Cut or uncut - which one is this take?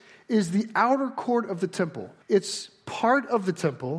cut